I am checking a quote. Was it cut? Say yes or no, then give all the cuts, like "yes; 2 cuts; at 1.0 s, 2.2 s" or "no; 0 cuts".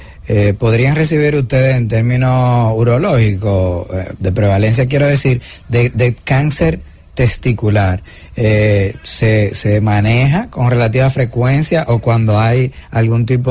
no; 0 cuts